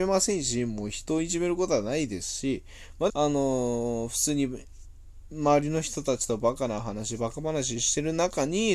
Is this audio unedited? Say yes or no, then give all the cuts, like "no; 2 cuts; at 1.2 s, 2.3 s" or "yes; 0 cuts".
no; 1 cut; at 3.1 s